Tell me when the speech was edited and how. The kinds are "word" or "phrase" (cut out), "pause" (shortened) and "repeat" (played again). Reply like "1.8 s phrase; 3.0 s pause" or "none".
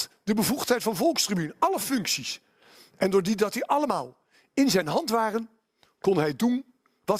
none